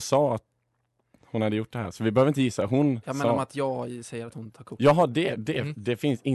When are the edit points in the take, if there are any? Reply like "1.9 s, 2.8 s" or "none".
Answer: none